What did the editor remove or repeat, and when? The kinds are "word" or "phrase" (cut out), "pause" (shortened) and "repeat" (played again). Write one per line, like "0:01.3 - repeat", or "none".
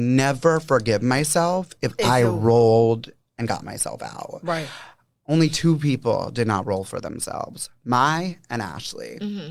none